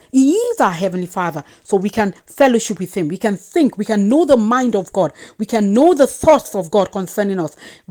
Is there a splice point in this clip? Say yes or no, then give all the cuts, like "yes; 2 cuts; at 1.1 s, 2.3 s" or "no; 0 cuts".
no; 0 cuts